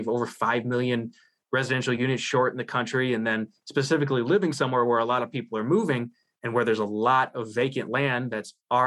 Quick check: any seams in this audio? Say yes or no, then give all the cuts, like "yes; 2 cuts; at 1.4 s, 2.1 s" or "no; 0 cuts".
no; 0 cuts